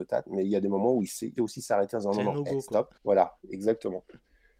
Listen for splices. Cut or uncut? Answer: cut